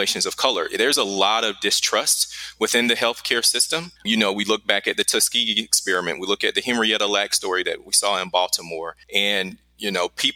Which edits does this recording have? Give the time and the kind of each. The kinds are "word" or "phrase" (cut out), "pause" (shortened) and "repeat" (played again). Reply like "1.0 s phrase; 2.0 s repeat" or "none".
4.0 s pause; 9.0 s pause